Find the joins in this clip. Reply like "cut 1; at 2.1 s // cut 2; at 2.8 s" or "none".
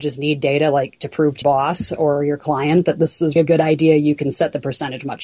cut 1; at 1.4 s // cut 2; at 3.4 s